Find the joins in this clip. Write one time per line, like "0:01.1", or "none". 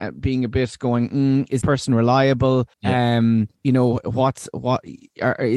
0:01.6
0:02.7
0:03.6

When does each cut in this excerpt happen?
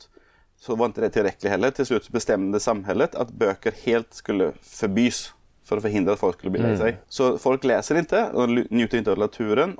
none

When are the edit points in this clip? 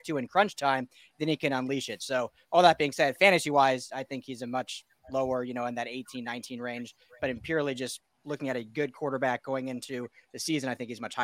none

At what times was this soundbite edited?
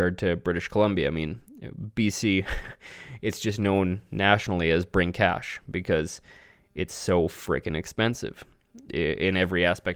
none

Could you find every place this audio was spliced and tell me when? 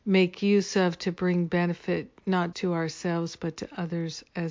0:02.5

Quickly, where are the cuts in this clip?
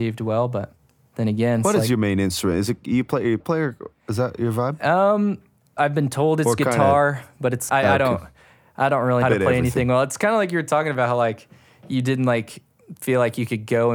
0:03.4
0:07.7
0:09.2

